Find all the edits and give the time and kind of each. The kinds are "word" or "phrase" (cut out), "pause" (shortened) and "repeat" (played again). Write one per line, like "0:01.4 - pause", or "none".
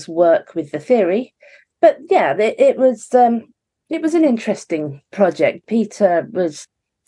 none